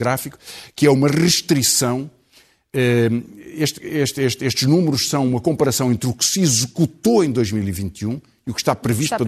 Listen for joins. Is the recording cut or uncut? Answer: uncut